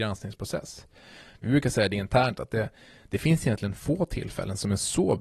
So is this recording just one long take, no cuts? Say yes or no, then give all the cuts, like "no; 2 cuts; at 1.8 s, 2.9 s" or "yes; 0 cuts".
yes; 0 cuts